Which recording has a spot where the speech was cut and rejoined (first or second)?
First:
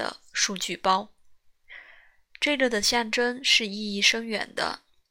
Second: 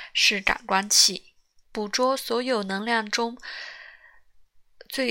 second